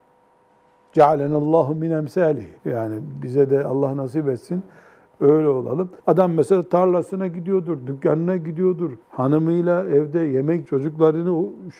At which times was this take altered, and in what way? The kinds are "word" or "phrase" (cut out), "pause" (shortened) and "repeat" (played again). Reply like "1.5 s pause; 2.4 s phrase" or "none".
2.6 s pause; 6.0 s pause; 9.0 s pause; 10.7 s word